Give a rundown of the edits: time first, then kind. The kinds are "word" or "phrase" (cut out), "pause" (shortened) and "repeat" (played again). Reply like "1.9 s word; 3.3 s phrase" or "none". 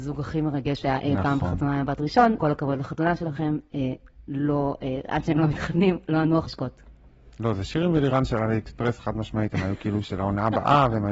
2.4 s word; 6.5 s word